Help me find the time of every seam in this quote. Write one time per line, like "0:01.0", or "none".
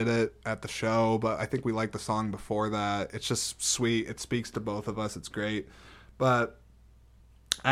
none

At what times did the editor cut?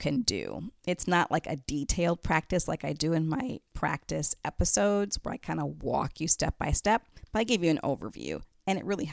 0:03.7

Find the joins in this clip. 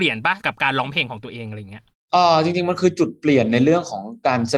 0:01.9

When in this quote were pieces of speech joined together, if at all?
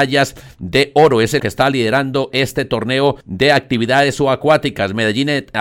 0:01.4
0:03.2

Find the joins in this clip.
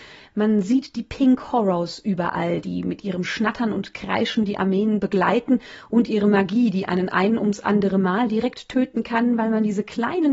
none

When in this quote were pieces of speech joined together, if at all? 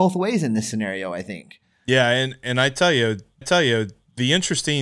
0:03.4

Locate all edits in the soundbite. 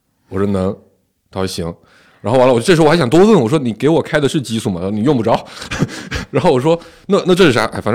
none

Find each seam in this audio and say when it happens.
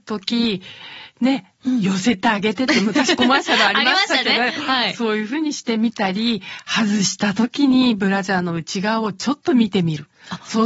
none

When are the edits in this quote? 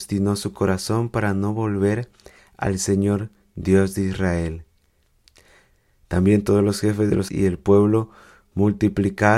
0:07.3

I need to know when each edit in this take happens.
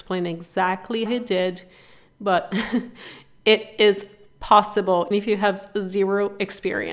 0:01.1
0:05.1

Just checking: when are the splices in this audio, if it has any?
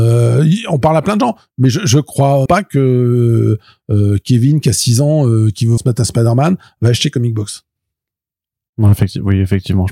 0:02.5
0:05.8

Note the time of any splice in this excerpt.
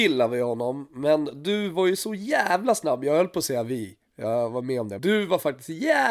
0:05.0

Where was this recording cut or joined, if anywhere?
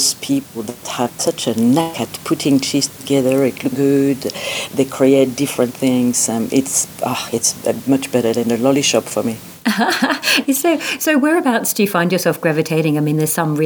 0:03.7

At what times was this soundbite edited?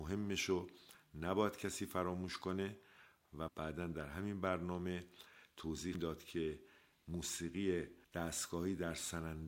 0:03.5
0:05.9
0:08.0

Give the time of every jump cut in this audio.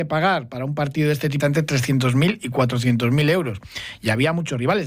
0:01.4

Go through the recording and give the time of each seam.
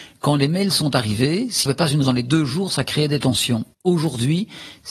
0:01.7
0:02.0
0:03.7

